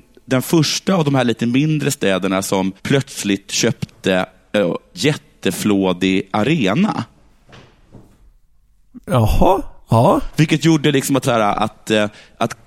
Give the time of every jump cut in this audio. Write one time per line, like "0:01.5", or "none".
0:02.8
0:04.9
0:09.0
0:11.2